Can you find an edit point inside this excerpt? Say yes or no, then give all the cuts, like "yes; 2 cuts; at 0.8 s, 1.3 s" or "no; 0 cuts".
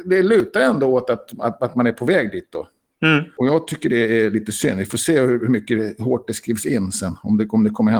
no; 0 cuts